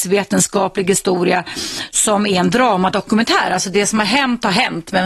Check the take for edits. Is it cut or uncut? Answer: uncut